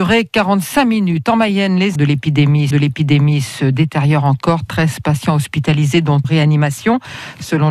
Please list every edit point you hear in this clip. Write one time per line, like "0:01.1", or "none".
0:02.0
0:02.7
0:06.2

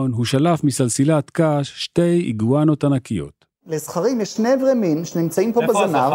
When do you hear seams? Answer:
0:03.5

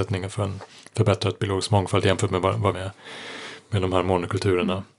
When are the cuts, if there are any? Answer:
0:02.7

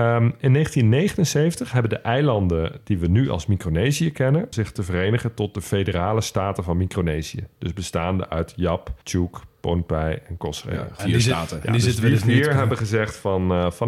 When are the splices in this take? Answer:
0:04.5
0:09.0
0:11.0

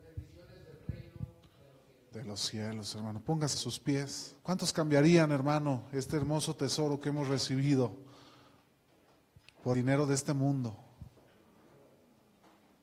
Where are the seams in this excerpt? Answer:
0:03.5
0:04.4
0:09.7

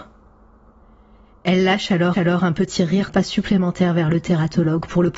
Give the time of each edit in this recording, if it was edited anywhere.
0:02.1
0:03.1

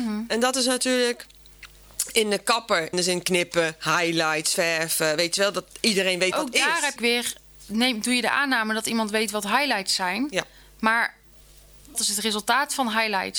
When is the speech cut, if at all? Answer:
0:02.9
0:06.3
0:07.0
0:11.9

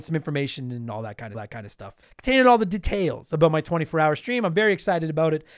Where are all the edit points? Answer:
0:01.3
0:02.0

